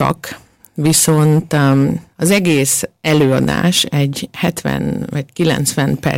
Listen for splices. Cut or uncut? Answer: cut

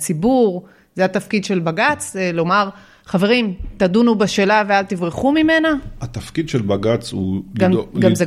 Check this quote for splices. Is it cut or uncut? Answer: uncut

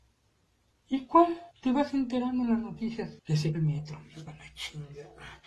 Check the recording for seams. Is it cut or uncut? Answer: cut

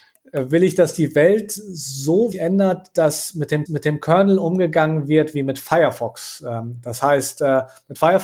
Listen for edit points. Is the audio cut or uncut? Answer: cut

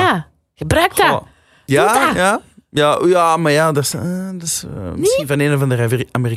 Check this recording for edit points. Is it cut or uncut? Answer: uncut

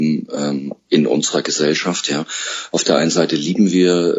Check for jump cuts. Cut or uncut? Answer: uncut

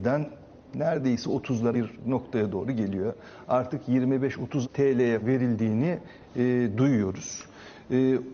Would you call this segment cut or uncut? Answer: cut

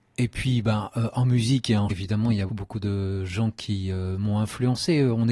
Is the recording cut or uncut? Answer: cut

